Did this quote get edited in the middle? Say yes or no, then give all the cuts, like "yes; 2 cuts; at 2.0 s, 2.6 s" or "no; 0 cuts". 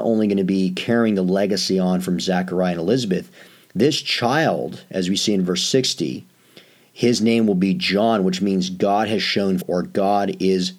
yes; 1 cut; at 9.6 s